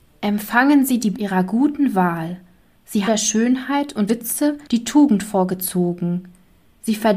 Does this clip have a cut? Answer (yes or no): yes